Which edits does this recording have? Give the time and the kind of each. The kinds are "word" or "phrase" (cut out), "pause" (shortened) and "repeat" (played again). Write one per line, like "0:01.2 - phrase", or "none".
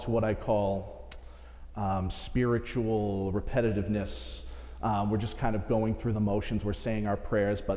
none